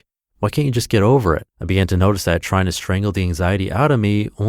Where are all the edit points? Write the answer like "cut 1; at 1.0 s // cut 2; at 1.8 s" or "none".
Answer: cut 1; at 1.5 s

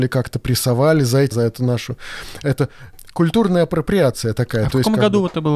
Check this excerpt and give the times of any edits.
cut 1; at 1.3 s

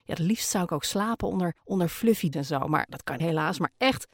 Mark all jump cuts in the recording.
cut 1; at 1.6 s // cut 2; at 2.3 s // cut 3; at 2.9 s // cut 4; at 3.2 s

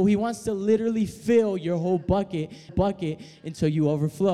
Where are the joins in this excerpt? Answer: cut 1; at 2.7 s

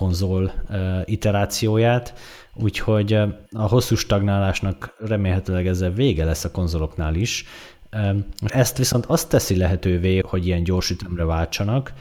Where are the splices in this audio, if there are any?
cut 1; at 3.5 s // cut 2; at 8.5 s // cut 3; at 10.2 s

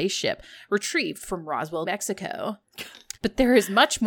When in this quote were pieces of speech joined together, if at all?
cut 1; at 1.8 s // cut 2; at 3.2 s

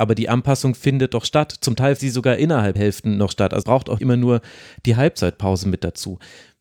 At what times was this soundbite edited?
cut 1; at 2.0 s // cut 2; at 2.7 s // cut 3; at 3.6 s // cut 4; at 4.0 s

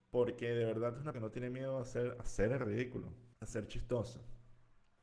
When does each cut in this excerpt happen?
cut 1; at 1.1 s // cut 2; at 3.3 s

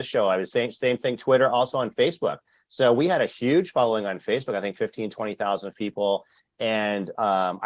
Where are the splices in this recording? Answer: none

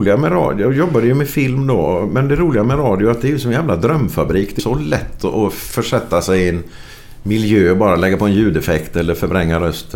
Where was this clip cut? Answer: cut 1; at 4.6 s

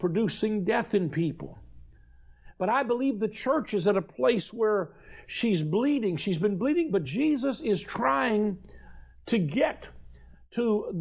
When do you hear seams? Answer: none

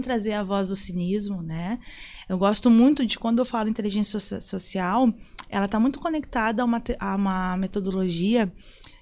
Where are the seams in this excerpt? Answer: none

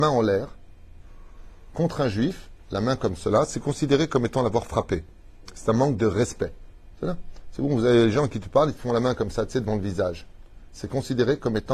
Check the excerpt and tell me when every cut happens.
cut 1; at 6.9 s

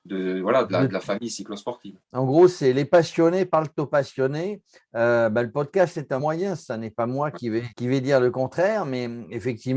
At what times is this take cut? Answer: cut 1; at 2.0 s // cut 2; at 6.2 s // cut 3; at 7.7 s

